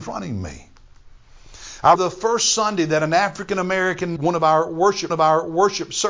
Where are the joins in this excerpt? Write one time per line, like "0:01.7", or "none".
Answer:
0:01.9
0:04.2
0:05.1